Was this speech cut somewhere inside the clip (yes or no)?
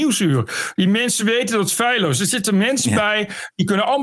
no